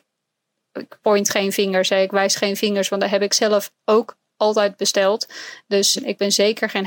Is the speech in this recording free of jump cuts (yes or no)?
no